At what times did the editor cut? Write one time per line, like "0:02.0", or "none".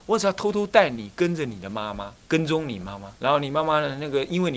0:02.2
0:03.2